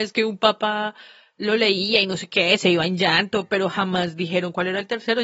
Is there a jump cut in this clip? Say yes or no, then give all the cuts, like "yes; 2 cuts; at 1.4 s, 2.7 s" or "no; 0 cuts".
no; 0 cuts